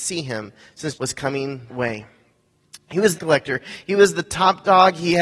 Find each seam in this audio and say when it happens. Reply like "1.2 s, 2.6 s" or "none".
0.9 s, 1.7 s, 3.2 s